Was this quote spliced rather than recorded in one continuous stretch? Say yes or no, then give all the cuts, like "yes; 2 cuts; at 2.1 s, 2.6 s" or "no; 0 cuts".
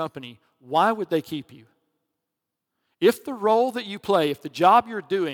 no; 0 cuts